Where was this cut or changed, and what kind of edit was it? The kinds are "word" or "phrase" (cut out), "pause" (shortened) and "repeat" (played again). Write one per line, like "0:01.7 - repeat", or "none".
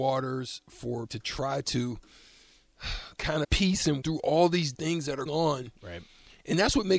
0:01.1 - word
0:03.4 - word
0:04.0 - word
0:04.7 - word
0:05.3 - word